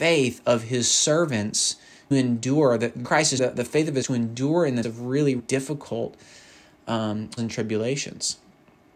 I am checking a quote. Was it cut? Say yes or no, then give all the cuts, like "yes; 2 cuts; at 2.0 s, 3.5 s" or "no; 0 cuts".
yes; 7 cuts; at 2.1 s, 3.0 s, 3.4 s, 4.0 s, 4.8 s, 5.4 s, 7.4 s